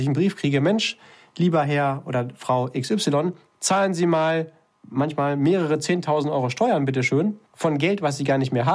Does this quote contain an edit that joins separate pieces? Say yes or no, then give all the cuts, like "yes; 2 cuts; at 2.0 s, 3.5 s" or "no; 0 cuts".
no; 0 cuts